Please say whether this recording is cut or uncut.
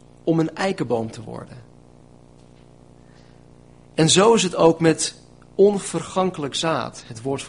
uncut